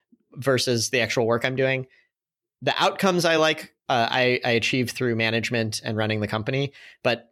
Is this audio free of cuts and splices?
yes; 0 cuts

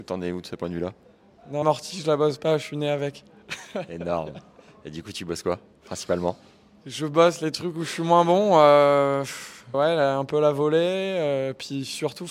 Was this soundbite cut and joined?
yes; 2 cuts; at 1.6 s, 9.7 s

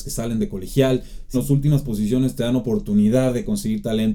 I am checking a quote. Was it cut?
yes; 1 cut; at 1.3 s

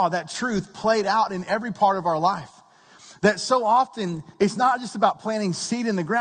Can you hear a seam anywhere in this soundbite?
no; 0 cuts

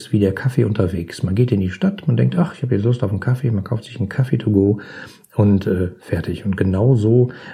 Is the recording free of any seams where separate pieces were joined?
yes; 0 cuts

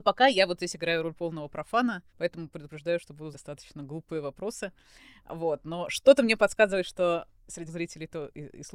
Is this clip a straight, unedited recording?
no; 3 cuts; at 2.1 s, 3.3 s, 7.7 s

